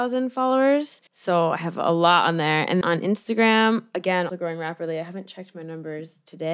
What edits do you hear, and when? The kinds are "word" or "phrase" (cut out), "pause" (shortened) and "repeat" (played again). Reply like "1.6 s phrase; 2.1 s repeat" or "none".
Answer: 1.1 s pause; 2.8 s word; 4.3 s word